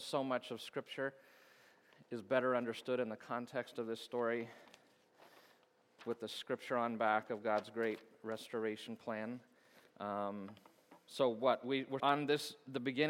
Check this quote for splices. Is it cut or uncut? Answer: cut